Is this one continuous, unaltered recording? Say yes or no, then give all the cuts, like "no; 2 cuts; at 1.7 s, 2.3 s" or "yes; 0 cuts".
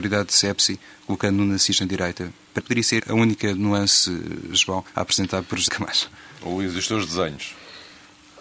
no; 4 cuts; at 2.6 s, 3.0 s, 4.9 s, 5.7 s